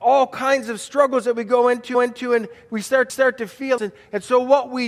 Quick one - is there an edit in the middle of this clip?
yes; 3 cuts; at 1.9 s, 3.1 s, 3.8 s

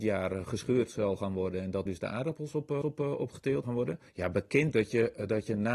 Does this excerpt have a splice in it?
yes; 5 cuts; at 1.9 s, 2.8 s, 3.6 s, 4.1 s, 4.7 s

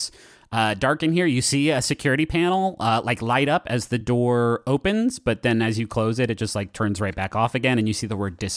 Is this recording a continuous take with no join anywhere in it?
yes; 0 cuts

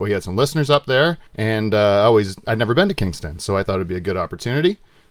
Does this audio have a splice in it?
yes; 1 cut; at 1.3 s

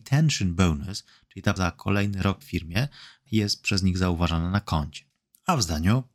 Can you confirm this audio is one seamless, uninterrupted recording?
no; 3 cuts; at 1.6 s, 2.4 s, 3.3 s

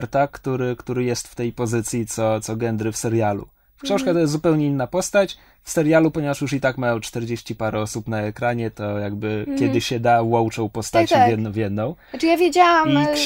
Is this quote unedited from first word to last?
yes; 0 cuts

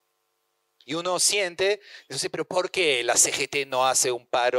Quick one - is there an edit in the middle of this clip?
no; 0 cuts

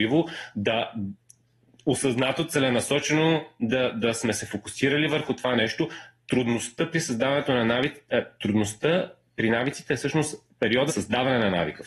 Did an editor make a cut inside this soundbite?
yes; 1 cut; at 10.9 s

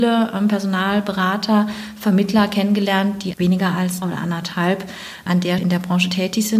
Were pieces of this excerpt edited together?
yes; 4 cuts; at 3.3 s, 4.0 s, 5.3 s, 5.6 s

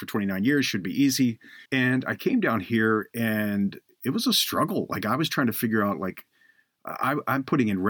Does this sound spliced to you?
yes; 1 cut; at 1.7 s

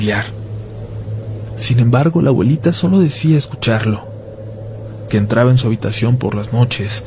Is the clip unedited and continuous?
yes; 0 cuts

